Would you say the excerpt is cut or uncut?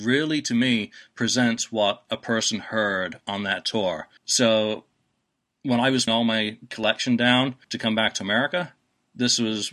cut